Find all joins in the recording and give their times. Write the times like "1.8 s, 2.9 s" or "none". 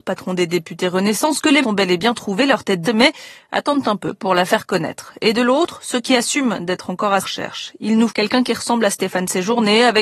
1.6 s, 2.8 s, 7.2 s, 8.1 s